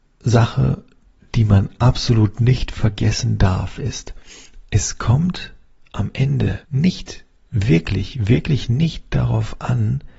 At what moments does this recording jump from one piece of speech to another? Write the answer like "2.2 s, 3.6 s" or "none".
6.6 s